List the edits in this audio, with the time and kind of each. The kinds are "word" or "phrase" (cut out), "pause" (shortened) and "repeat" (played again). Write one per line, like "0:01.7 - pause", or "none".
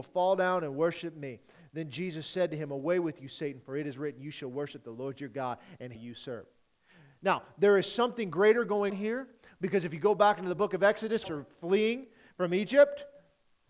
0:06.0 - phrase
0:08.9 - word
0:11.2 - phrase